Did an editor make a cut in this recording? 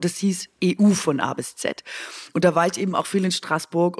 no; 0 cuts

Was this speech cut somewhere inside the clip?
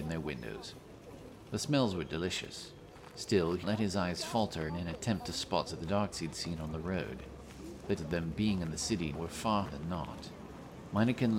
yes; 7 cuts; at 3.6 s, 4.7 s, 5.7 s, 6.1 s, 8.0 s, 9.2 s, 9.7 s

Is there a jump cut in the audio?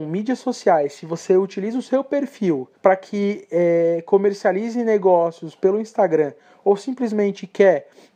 yes; 1 cut; at 2.8 s

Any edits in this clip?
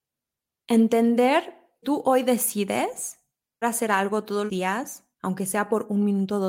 yes; 4 cuts; at 1.8 s, 3.6 s, 4.5 s, 5.1 s

